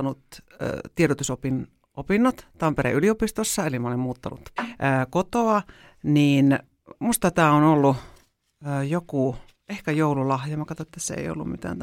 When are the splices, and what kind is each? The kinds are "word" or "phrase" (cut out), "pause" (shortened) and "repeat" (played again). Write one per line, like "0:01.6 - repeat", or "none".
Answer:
0:04.6 - word